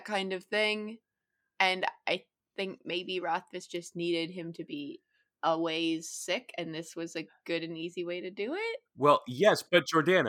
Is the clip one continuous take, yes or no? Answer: yes